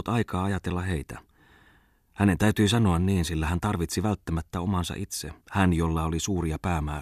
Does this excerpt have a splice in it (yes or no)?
yes